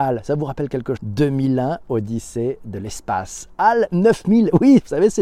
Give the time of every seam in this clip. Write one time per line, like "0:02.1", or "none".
0:01.0